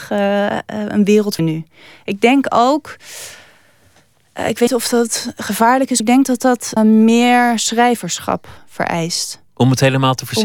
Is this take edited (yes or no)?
yes